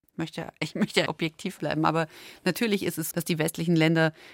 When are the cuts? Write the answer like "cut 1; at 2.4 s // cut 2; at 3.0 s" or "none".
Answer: cut 1; at 1.1 s // cut 2; at 1.6 s // cut 3; at 3.1 s